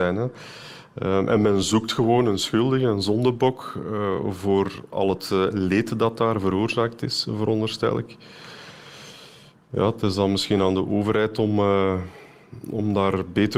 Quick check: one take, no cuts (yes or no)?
yes